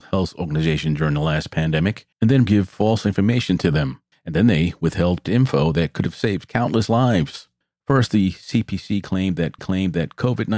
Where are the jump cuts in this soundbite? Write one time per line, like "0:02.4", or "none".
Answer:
0:02.1
0:02.5
0:04.1
0:05.2
0:07.6
0:09.6